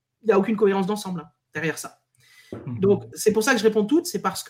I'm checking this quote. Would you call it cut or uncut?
cut